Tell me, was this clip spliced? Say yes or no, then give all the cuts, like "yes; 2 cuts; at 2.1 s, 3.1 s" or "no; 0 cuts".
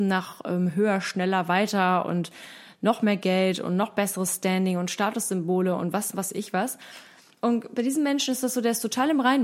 no; 0 cuts